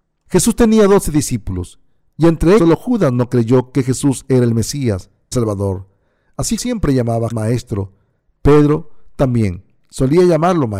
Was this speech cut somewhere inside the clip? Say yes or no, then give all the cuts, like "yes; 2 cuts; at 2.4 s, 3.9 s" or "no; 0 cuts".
yes; 4 cuts; at 2.6 s, 5.3 s, 6.6 s, 7.3 s